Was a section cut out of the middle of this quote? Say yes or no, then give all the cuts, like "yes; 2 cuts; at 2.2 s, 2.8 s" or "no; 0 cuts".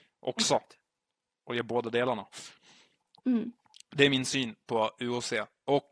no; 0 cuts